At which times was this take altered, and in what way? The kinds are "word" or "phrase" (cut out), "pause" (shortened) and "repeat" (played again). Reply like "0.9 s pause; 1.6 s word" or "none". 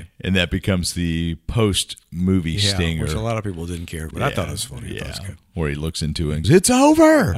4.1 s word; 6.4 s word